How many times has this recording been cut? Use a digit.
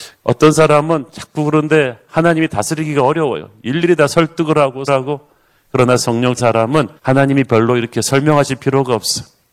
3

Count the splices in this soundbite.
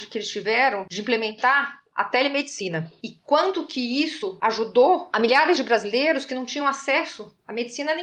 0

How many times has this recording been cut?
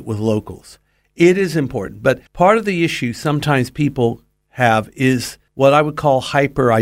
2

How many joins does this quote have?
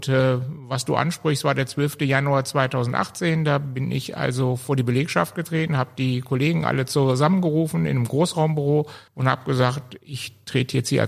1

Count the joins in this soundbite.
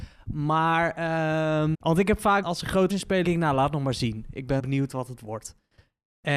5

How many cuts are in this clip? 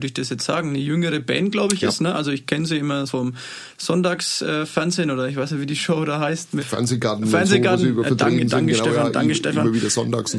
2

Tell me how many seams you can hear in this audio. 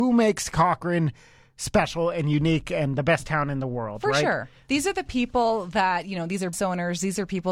1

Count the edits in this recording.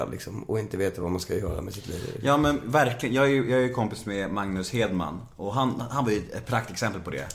0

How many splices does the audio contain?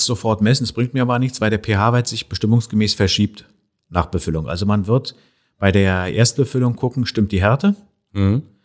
0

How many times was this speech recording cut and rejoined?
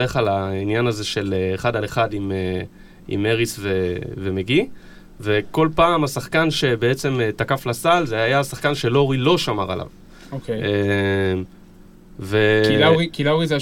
0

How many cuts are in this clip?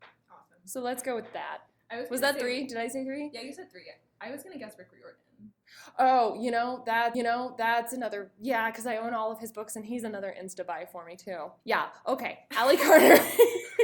2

